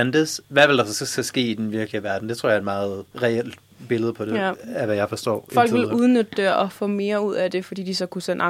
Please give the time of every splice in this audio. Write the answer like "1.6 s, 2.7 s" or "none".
3.1 s